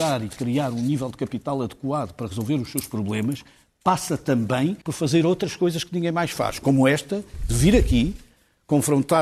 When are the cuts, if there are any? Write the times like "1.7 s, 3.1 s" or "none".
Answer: 4.8 s